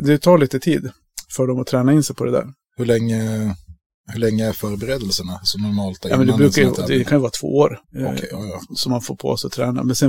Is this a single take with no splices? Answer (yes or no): no